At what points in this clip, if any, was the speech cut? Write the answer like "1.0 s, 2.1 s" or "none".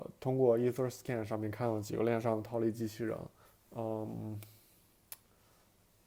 3.5 s